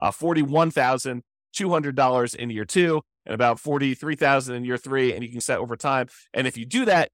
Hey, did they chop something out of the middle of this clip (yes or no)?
yes